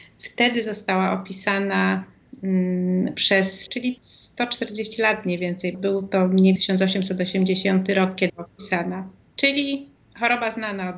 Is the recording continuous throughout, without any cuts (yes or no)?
no